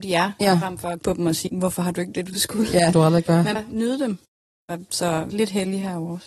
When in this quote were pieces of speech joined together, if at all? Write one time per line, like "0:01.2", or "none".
0:01.0
0:01.5
0:02.1
0:02.9
0:03.6
0:05.3